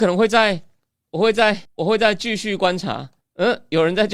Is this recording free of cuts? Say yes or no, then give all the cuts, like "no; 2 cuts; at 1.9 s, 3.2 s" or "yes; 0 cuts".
no; 2 cuts; at 1.6 s, 3.2 s